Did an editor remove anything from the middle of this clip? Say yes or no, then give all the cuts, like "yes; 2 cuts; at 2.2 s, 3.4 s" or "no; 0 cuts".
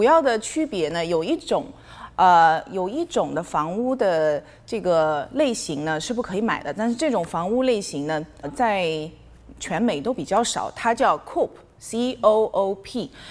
yes; 1 cut; at 8.4 s